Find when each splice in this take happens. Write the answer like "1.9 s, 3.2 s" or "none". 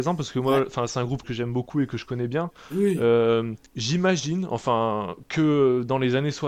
1.2 s, 3.7 s